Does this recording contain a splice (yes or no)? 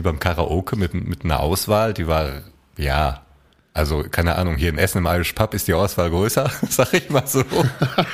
no